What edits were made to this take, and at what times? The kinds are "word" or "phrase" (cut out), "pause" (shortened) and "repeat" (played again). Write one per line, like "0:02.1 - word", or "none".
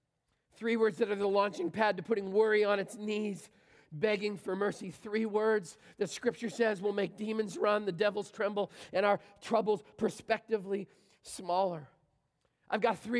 none